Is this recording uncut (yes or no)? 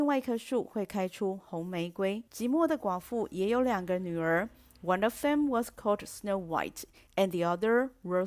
no